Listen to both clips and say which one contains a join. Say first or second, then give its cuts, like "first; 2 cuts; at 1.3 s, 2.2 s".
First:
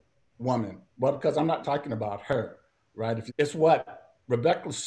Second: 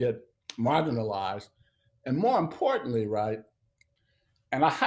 first; 2 cuts; at 1.6 s, 3.3 s